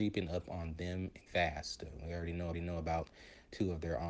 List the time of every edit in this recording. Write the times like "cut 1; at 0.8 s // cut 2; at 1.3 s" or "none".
cut 1; at 1.3 s // cut 2; at 2.5 s